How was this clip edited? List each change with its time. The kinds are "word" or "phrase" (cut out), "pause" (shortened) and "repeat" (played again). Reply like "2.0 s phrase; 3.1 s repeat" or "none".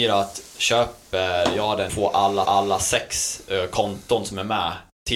1.9 s phrase; 2.5 s repeat